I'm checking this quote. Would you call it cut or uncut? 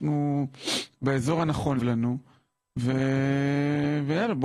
cut